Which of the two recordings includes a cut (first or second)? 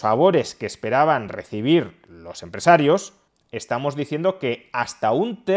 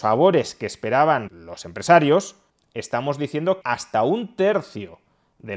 second